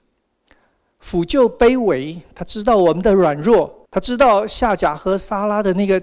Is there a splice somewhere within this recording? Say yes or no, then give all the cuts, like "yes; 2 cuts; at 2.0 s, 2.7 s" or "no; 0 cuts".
yes; 1 cut; at 3.9 s